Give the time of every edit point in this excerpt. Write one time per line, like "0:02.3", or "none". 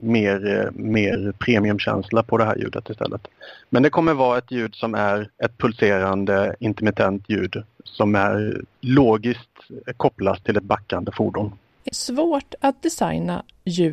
0:01.4
0:05.3
0:08.7
0:11.9